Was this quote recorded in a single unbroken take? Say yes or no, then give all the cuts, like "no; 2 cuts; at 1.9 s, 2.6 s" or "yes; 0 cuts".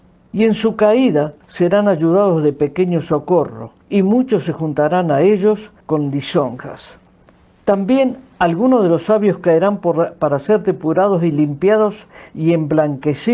no; 4 cuts; at 1.4 s, 3.8 s, 5.8 s, 7.3 s